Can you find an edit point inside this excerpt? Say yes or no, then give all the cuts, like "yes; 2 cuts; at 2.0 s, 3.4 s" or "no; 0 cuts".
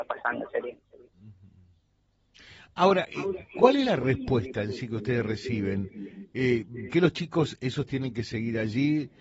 yes; 1 cut; at 6.9 s